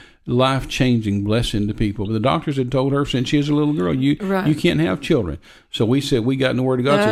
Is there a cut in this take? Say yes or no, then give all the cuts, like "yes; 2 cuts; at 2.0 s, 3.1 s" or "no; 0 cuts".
no; 0 cuts